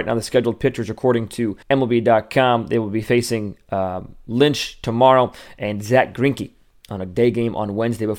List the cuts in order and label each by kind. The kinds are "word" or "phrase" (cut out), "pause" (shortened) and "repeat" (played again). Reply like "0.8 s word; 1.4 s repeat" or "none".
1.6 s pause